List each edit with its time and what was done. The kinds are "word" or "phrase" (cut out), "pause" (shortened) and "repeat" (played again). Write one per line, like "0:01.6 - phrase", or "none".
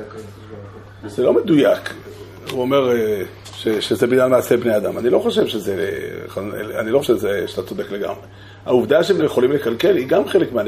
0:07.0 - word
0:09.2 - word